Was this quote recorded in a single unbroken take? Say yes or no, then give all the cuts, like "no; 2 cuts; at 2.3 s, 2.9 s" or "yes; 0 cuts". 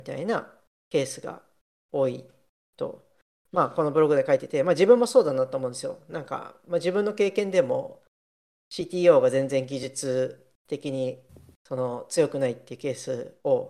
yes; 0 cuts